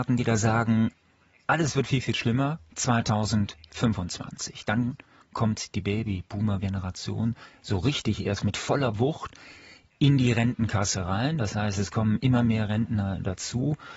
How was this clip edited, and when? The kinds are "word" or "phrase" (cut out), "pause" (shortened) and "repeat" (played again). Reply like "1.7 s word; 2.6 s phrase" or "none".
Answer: none